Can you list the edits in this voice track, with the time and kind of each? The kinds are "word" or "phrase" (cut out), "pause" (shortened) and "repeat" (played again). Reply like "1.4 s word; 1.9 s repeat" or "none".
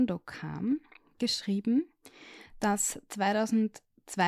none